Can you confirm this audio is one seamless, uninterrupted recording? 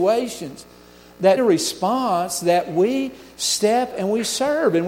no; 2 cuts; at 1.4 s, 3.9 s

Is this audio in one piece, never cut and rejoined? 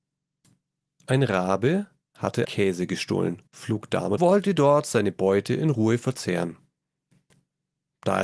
no; 3 cuts; at 2.4 s, 3.5 s, 4.2 s

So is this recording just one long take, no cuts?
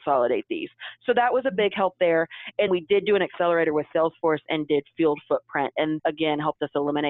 no; 2 cuts; at 2.7 s, 6.0 s

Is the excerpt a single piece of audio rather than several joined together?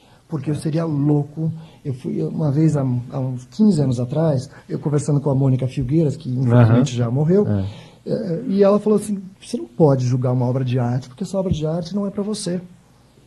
no; 2 cuts; at 4.6 s, 9.3 s

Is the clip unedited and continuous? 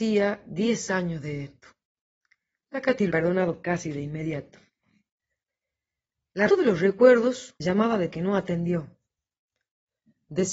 no; 4 cuts; at 3.1 s, 6.5 s, 7.6 s, 8.1 s

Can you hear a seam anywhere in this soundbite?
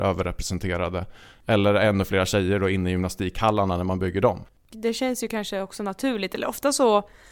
no; 0 cuts

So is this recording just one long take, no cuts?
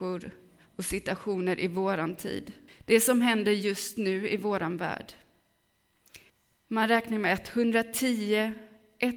no; 2 cuts; at 2.7 s, 6.3 s

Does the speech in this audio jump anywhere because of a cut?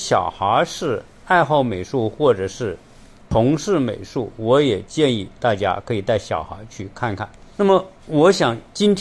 no; 0 cuts

